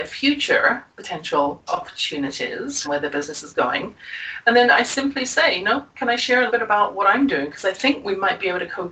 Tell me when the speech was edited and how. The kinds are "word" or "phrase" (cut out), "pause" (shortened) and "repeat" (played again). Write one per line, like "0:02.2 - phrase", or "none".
0:01.7 - word
0:02.8 - word
0:06.5 - word